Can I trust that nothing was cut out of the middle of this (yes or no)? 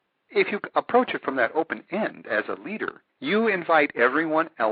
no